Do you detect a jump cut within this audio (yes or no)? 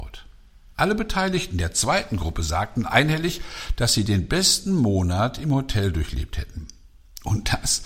no